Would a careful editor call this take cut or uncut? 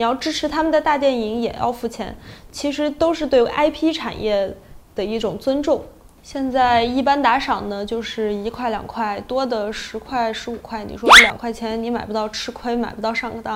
uncut